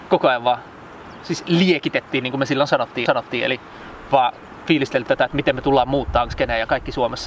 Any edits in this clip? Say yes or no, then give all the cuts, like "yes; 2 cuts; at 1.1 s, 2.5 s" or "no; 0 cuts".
yes; 3 cuts; at 3.1 s, 5.1 s, 6.3 s